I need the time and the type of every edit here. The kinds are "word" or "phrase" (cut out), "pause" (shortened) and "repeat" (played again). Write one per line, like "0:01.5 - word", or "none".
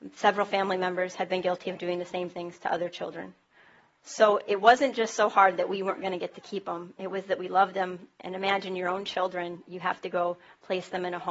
none